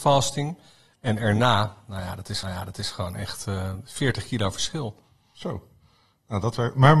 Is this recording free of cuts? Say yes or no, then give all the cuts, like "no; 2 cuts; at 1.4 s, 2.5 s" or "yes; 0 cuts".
no; 1 cut; at 2.4 s